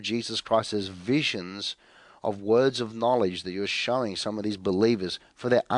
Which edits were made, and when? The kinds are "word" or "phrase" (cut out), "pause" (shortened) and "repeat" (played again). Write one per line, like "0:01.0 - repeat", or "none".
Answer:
none